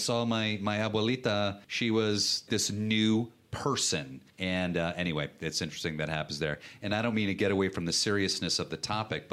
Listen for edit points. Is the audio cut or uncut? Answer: cut